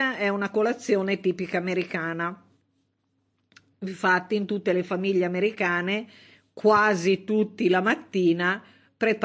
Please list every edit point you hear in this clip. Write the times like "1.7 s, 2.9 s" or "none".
none